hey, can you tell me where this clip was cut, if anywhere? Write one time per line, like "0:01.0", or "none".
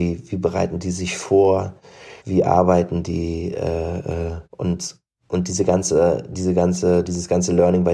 0:02.2
0:04.4